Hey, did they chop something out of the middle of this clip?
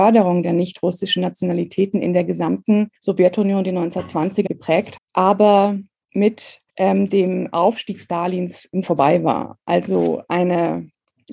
yes; 5 cuts; at 3.0 s, 4.5 s, 5.0 s, 6.7 s, 8.8 s

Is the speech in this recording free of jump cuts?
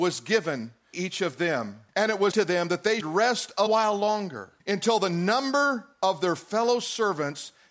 no; 6 cuts; at 0.9 s, 1.9 s, 2.3 s, 3.0 s, 3.7 s, 4.6 s

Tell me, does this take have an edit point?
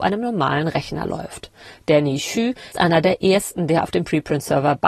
yes; 1 cut; at 2.7 s

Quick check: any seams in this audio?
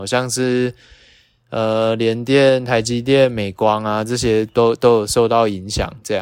no; 0 cuts

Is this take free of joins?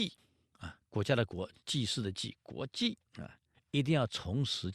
no; 2 cuts; at 3.1 s, 3.5 s

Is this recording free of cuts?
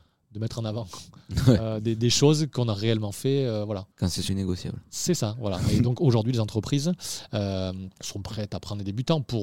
no; 3 cuts; at 3.9 s, 4.3 s, 8.0 s

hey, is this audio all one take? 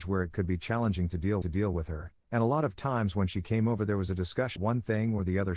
no; 2 cuts; at 1.4 s, 4.6 s

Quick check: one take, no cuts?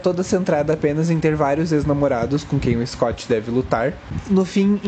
yes; 0 cuts

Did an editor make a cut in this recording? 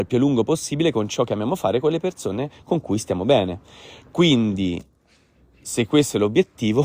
no; 0 cuts

